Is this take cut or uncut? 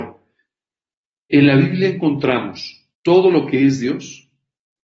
cut